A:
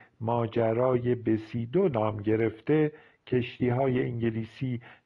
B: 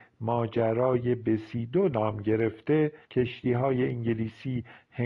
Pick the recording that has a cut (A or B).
B